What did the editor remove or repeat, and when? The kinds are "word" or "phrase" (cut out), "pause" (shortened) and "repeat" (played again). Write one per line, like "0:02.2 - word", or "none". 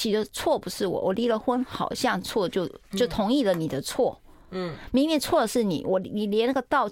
none

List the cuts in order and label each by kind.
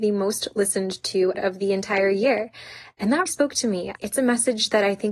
0:01.3 - word
0:03.3 - word
0:04.0 - word

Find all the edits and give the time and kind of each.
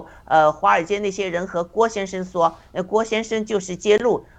none

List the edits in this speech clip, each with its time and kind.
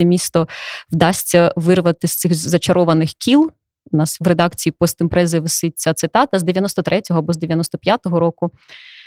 none

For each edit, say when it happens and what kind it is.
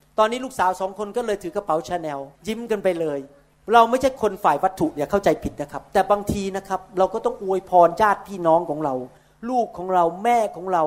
0:02.3 - pause
0:03.5 - pause

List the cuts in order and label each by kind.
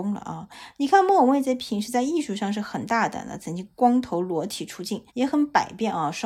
0:05.1 - pause

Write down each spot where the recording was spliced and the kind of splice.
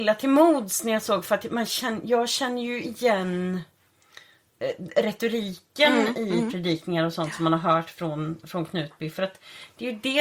none

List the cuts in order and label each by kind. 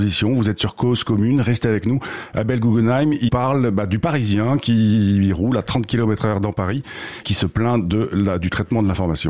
0:03.3 - word
0:07.2 - word

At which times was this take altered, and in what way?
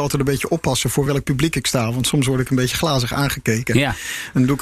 none

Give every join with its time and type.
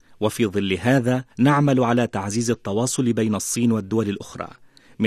0:01.3 - pause

